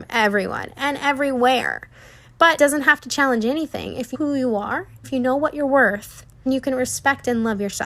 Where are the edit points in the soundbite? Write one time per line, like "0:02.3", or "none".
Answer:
0:02.6
0:04.1
0:05.0
0:06.5